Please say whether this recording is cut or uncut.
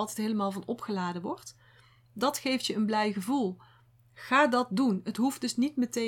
uncut